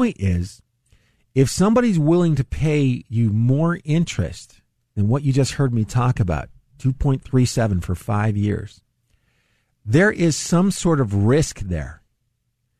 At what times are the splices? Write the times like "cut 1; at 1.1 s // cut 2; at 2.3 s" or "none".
none